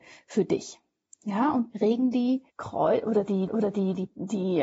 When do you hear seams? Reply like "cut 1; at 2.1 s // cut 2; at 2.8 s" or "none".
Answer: cut 1; at 1.7 s // cut 2; at 2.5 s // cut 3; at 3.5 s